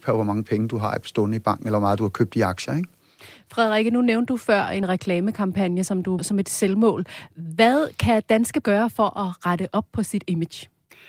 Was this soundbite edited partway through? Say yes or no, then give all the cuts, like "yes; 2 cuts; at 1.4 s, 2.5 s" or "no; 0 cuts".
yes; 3 cuts; at 4.8 s, 6.2 s, 8.6 s